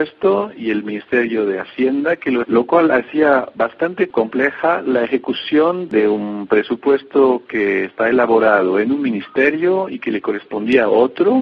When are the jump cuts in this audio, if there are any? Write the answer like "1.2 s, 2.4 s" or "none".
2.4 s

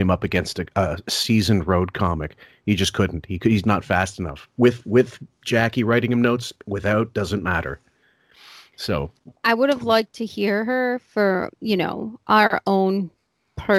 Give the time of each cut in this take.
3.6 s, 9.4 s

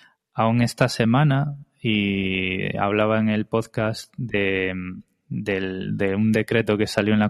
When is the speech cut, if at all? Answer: none

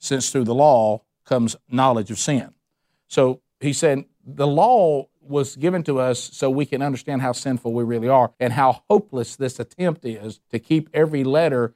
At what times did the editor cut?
5.2 s, 8.3 s, 10.4 s

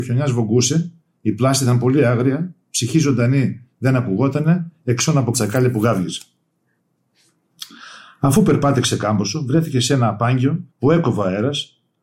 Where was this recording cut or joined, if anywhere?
5.3 s, 10.7 s

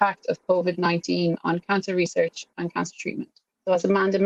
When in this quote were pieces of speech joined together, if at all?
none

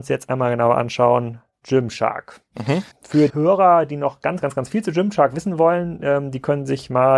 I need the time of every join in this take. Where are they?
2.9 s, 3.3 s, 4.4 s

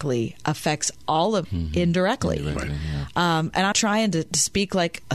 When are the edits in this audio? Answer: 1.4 s, 3.7 s

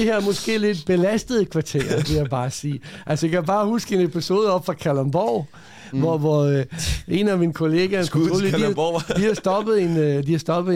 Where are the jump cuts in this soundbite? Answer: none

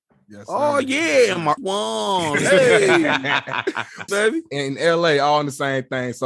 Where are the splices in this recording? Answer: 1.6 s, 4.1 s

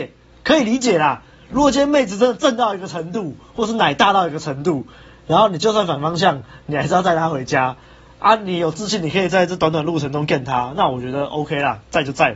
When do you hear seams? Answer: none

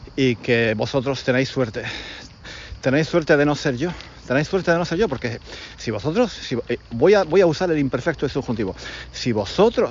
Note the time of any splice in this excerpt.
none

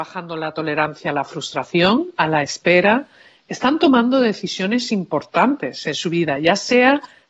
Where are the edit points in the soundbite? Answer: none

